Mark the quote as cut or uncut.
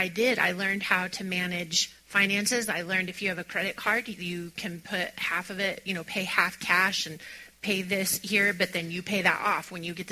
uncut